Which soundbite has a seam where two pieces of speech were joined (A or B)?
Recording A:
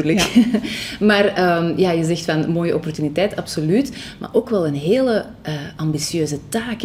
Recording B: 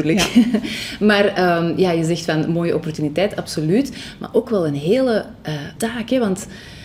B